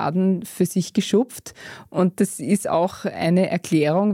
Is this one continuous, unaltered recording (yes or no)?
yes